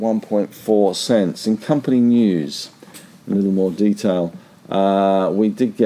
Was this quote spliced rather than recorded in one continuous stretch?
no; 0 cuts

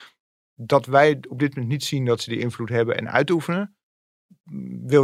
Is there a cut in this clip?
no; 0 cuts

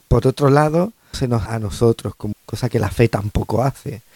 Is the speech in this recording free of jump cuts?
no; 3 cuts; at 1.1 s, 1.5 s, 2.3 s

